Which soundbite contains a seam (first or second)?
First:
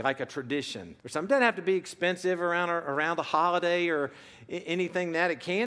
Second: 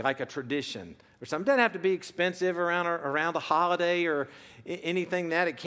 first